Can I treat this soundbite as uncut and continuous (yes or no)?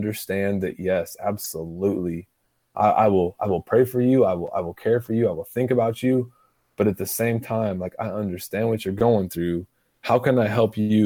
yes